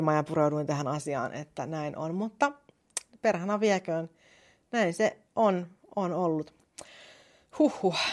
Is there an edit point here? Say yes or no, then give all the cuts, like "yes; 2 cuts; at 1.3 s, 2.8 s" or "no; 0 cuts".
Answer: no; 0 cuts